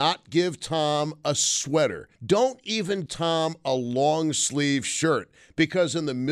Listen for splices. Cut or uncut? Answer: cut